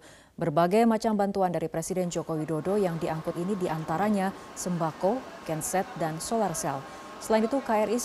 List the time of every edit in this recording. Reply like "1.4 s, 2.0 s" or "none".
3.3 s, 5.4 s